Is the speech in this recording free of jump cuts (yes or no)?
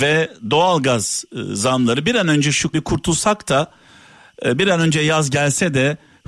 no